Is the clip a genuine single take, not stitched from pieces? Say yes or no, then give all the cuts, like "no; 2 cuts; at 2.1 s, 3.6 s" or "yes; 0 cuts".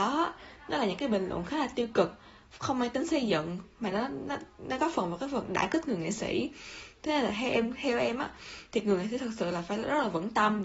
yes; 0 cuts